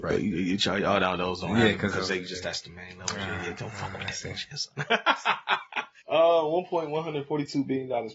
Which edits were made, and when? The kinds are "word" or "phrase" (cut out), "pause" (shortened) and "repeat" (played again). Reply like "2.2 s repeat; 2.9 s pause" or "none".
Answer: 4.7 s pause; 6.0 s pause